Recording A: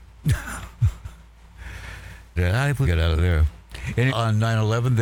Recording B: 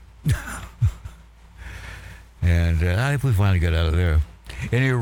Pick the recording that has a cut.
A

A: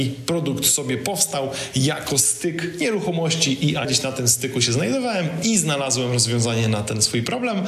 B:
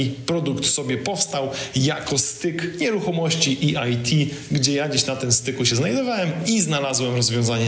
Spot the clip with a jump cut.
A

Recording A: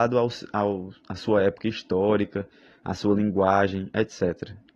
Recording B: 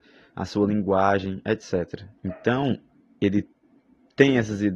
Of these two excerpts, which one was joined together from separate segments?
B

